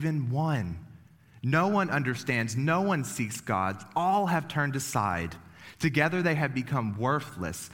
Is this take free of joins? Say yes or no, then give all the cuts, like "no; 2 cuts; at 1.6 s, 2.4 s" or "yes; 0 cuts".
yes; 0 cuts